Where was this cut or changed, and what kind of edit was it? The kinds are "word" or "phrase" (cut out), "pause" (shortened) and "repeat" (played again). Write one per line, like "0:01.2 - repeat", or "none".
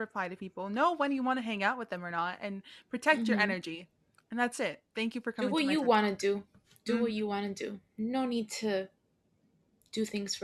none